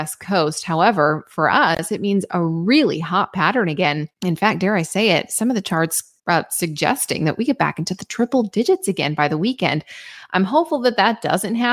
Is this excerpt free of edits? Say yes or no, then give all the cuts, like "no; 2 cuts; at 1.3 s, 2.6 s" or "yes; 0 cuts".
no; 2 cuts; at 4.1 s, 6.2 s